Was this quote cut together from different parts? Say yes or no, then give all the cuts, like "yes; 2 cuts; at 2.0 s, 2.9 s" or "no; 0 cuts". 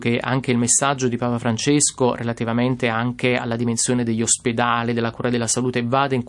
no; 0 cuts